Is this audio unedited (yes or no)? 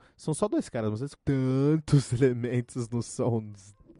no